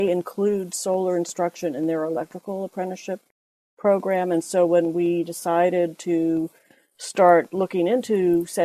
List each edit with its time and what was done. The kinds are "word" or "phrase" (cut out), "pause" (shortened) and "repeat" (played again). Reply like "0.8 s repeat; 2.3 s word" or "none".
none